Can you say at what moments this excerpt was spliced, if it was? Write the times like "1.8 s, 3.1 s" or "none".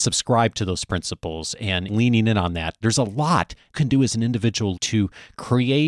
1.9 s, 3.7 s, 4.8 s